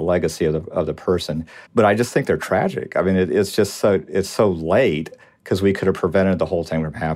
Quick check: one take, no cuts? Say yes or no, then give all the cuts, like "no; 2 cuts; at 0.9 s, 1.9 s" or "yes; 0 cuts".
no; 1 cut; at 1.7 s